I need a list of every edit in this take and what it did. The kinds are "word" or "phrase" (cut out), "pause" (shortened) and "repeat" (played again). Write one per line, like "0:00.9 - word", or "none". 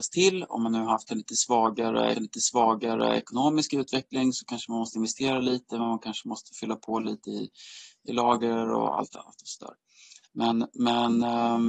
0:02.1 - repeat